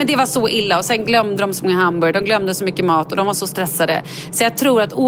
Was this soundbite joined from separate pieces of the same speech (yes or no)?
no